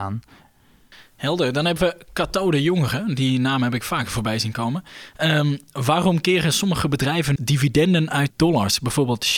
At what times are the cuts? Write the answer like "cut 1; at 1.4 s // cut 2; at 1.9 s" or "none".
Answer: cut 1; at 7.4 s // cut 2; at 8.3 s